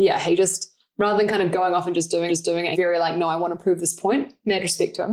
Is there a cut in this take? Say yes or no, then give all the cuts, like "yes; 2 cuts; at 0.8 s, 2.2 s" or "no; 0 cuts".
yes; 2 cuts; at 2.3 s, 2.7 s